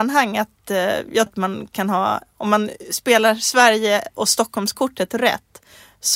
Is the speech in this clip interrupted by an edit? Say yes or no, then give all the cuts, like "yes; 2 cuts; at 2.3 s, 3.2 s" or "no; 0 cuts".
yes; 1 cut; at 1.3 s